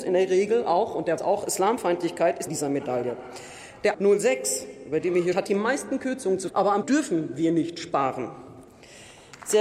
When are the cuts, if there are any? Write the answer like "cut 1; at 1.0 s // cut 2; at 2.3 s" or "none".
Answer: cut 1; at 1.2 s // cut 2; at 2.5 s // cut 3; at 3.9 s // cut 4; at 5.3 s // cut 5; at 6.5 s // cut 6; at 6.8 s